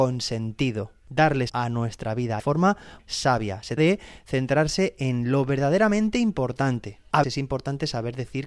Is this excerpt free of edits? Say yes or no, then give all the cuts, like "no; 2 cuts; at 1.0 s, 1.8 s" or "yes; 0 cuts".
no; 5 cuts; at 1.5 s, 2.4 s, 3.0 s, 3.8 s, 7.2 s